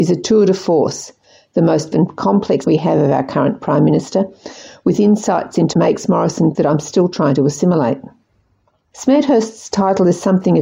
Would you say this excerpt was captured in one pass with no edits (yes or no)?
no